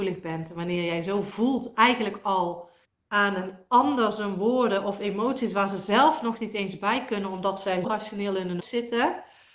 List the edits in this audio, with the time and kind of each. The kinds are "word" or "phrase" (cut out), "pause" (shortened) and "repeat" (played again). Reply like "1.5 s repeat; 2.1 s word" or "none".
2.8 s pause; 7.8 s word; 8.6 s word